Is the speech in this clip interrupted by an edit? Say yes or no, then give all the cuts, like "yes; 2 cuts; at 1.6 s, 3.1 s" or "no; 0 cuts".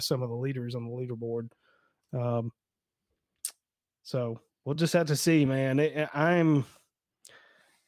no; 0 cuts